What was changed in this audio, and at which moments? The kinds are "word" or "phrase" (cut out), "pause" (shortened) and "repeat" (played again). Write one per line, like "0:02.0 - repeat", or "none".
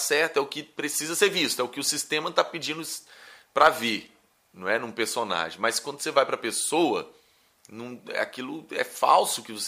none